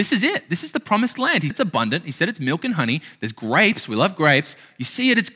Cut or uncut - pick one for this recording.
cut